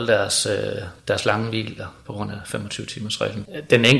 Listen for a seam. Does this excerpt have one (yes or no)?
no